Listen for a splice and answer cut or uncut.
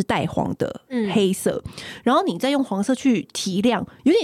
uncut